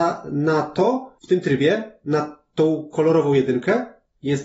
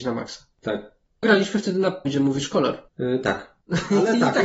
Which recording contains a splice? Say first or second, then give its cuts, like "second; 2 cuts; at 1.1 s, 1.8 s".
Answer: second; 3 cuts; at 1.2 s, 2.0 s, 2.9 s